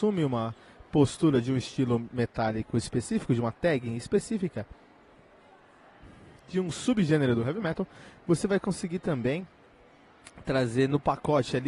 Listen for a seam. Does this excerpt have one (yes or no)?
no